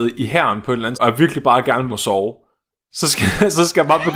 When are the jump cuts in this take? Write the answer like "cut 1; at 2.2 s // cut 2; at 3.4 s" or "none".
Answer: cut 1; at 0.9 s // cut 2; at 1.9 s